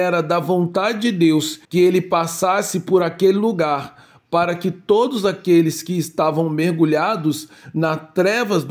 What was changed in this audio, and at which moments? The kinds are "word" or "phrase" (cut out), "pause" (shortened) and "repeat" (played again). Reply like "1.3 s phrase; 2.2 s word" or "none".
1.6 s pause